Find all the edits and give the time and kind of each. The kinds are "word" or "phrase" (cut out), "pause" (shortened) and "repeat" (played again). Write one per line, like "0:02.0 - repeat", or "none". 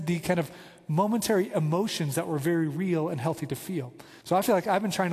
0:04.2 - pause